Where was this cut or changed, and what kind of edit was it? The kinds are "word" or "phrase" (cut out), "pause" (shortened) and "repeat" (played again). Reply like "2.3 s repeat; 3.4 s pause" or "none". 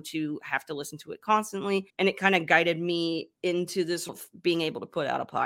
1.9 s pause; 3.4 s pause; 4.1 s word